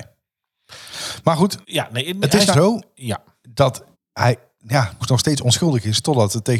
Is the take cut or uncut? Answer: cut